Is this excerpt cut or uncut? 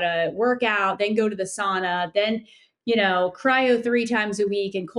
uncut